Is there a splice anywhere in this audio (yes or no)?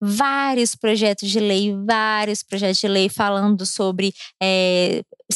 no